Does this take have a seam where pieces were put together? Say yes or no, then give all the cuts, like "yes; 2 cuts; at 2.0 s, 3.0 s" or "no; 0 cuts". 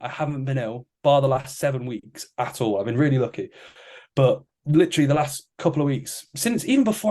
no; 0 cuts